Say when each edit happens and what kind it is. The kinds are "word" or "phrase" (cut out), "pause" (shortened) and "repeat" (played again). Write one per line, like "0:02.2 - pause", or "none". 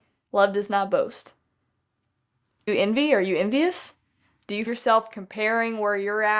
0:02.7 - word
0:04.7 - word